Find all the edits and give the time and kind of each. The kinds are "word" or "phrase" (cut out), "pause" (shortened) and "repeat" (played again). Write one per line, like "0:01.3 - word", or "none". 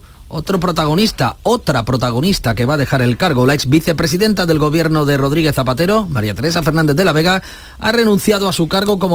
none